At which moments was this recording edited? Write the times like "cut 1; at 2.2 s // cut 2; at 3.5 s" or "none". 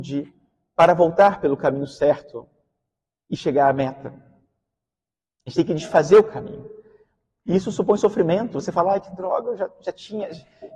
none